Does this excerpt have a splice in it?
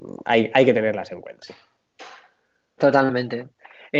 yes; 1 cut; at 1.4 s

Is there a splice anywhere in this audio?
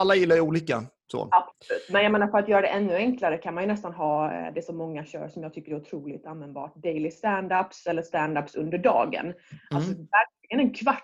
no; 0 cuts

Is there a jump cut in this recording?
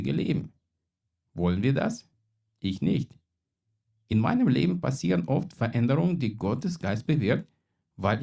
no; 0 cuts

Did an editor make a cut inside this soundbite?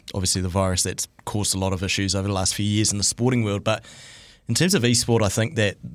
no; 0 cuts

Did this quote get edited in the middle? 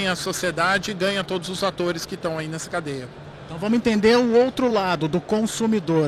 no; 0 cuts

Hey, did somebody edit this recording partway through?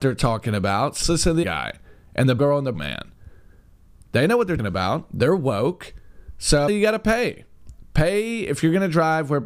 yes; 6 cuts; at 1.0 s, 1.4 s, 2.4 s, 2.7 s, 4.6 s, 6.7 s

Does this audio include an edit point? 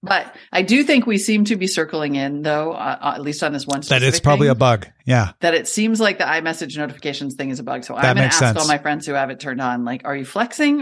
no; 0 cuts

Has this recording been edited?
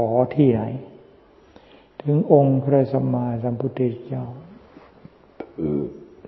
no; 0 cuts

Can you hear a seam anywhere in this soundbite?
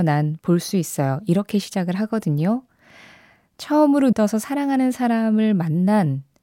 yes; 1 cut; at 4.1 s

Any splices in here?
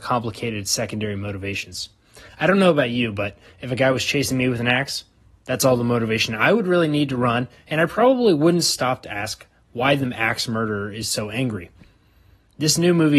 no; 0 cuts

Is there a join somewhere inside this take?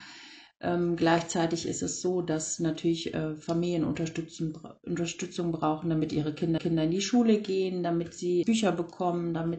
yes; 2 cuts; at 6.6 s, 8.4 s

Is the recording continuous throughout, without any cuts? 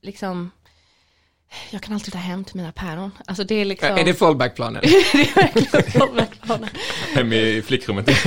no; 1 cut; at 2.1 s

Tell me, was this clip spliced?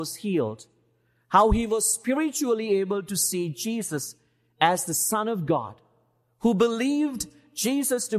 no; 0 cuts

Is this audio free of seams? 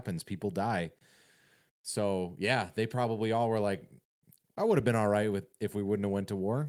yes; 0 cuts

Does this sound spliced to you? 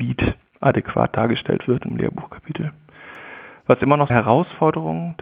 yes; 2 cuts; at 1.9 s, 4.1 s

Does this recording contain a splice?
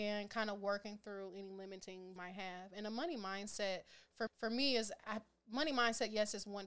yes; 3 cuts; at 2.2 s, 4.3 s, 5.0 s

